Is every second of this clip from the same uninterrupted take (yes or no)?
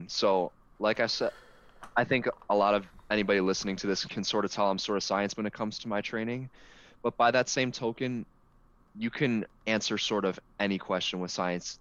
no